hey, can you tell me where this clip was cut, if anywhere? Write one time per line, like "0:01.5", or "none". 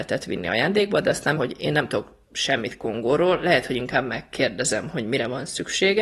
0:01.4